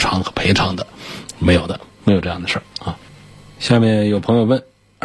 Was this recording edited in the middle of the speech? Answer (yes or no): no